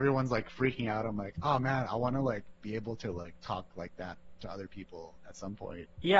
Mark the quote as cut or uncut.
uncut